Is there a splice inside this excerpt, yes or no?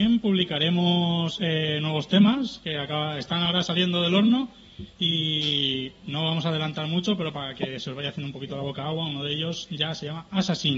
no